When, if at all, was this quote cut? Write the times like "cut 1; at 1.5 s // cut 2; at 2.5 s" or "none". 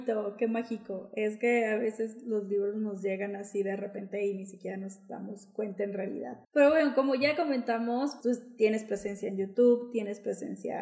cut 1; at 6.4 s // cut 2; at 8.2 s

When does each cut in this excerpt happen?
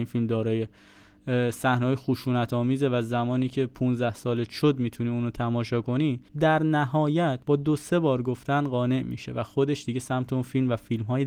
cut 1; at 6.3 s // cut 2; at 7.4 s

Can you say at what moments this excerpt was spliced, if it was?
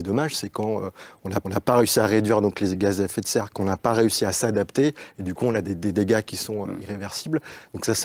cut 1; at 1.4 s // cut 2; at 6.6 s

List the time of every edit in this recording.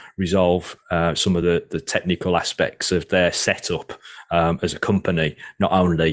none

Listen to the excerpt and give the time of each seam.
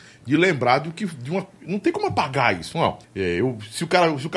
cut 1; at 3.0 s

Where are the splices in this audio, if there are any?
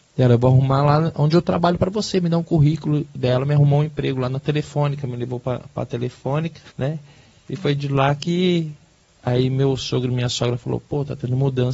cut 1; at 6.7 s

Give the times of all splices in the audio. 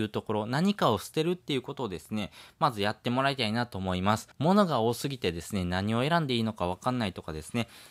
cut 1; at 4.3 s

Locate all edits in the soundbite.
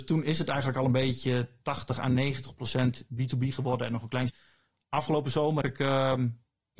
cut 1; at 4.3 s // cut 2; at 5.6 s

